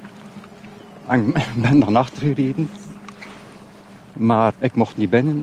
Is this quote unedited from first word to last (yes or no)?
no